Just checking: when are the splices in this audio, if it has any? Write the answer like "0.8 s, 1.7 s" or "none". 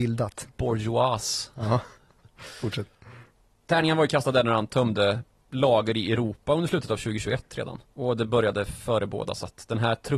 7.9 s